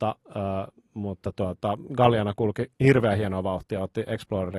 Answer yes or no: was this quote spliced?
yes